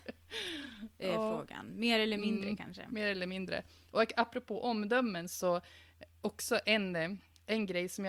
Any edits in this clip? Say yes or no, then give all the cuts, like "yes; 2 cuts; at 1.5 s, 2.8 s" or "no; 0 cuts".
no; 0 cuts